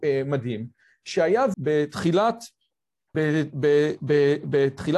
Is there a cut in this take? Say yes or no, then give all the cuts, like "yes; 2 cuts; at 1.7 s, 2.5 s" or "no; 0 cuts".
yes; 2 cuts; at 1.5 s, 3.1 s